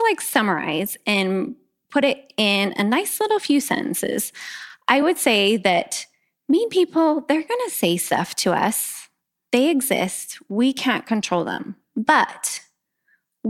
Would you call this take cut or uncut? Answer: uncut